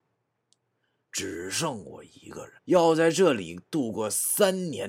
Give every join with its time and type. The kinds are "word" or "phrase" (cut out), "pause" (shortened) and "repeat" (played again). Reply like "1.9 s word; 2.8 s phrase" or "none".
2.6 s pause